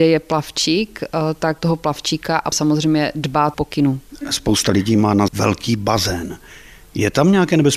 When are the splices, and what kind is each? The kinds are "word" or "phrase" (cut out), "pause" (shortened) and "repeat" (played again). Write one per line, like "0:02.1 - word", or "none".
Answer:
0:01.6 - word
0:02.5 - word
0:03.5 - word
0:05.3 - word